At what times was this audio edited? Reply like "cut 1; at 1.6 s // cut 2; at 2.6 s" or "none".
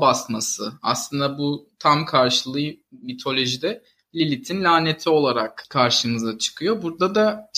none